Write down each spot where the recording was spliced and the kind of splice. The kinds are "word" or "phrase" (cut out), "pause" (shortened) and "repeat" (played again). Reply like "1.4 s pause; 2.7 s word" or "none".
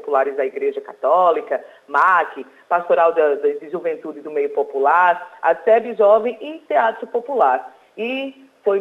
none